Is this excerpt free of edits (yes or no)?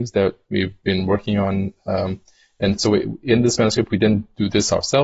yes